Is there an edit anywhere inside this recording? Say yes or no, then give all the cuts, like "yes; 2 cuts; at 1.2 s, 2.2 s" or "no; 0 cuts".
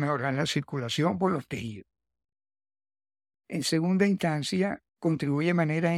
no; 0 cuts